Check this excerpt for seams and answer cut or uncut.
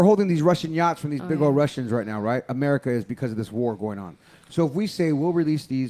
uncut